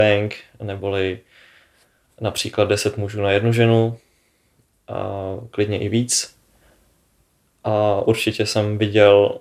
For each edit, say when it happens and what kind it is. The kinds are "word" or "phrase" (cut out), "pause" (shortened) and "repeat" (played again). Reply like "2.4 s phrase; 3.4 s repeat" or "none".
none